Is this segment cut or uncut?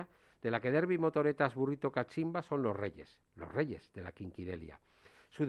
uncut